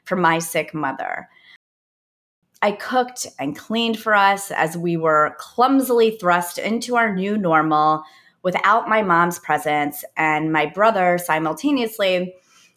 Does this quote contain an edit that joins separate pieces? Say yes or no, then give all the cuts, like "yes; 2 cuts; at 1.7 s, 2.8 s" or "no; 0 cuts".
no; 0 cuts